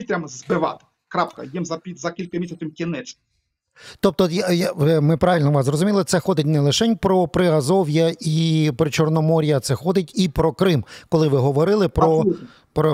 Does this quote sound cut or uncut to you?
uncut